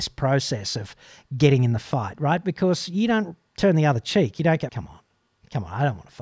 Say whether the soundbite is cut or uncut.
cut